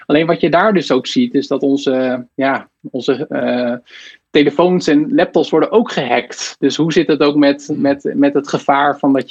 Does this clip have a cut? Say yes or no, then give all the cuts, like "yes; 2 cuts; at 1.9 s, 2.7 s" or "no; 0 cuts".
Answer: no; 0 cuts